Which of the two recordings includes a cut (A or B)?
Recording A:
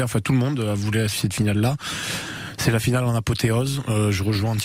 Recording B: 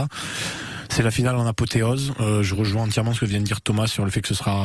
A